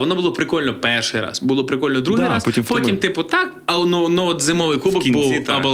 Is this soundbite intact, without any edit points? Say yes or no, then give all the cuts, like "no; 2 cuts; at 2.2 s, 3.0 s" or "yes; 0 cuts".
yes; 0 cuts